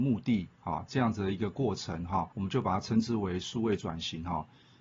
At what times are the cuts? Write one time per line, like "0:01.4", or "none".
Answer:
0:02.3